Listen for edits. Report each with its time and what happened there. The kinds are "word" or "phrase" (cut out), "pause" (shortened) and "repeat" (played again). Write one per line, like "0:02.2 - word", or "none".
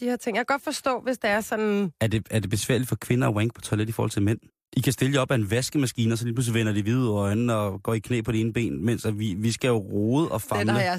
0:04.5 - pause